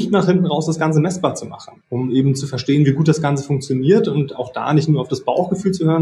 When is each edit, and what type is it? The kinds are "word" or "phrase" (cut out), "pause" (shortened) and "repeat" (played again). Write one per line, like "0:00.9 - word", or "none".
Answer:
0:01.8 - pause